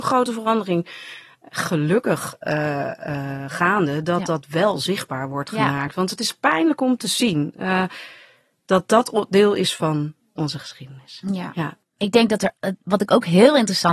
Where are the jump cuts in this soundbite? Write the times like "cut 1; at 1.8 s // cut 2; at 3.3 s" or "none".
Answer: none